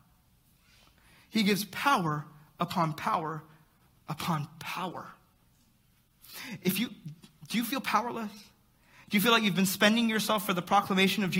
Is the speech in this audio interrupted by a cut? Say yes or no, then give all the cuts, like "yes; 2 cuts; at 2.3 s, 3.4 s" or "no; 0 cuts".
no; 0 cuts